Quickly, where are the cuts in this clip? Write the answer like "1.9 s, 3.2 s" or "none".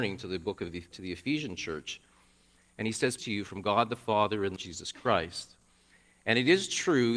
0.9 s, 3.2 s, 4.6 s

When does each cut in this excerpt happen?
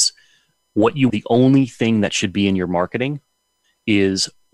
1.1 s

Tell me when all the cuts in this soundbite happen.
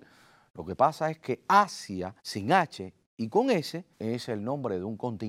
2.2 s, 3.9 s

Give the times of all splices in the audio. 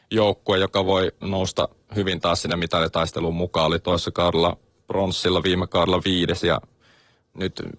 none

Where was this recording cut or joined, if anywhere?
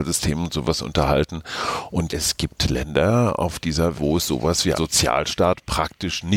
2.1 s, 3.9 s, 4.7 s

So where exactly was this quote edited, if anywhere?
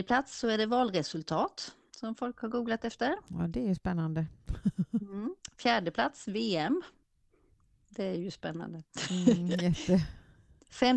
none

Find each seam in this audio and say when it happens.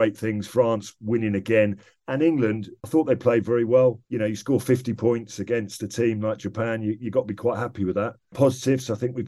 none

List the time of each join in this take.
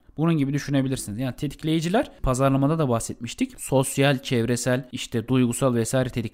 none

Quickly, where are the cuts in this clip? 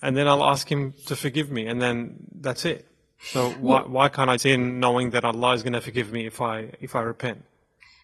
4.4 s

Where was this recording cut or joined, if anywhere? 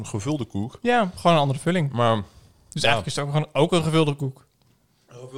none

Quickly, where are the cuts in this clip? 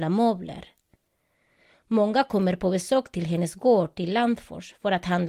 none

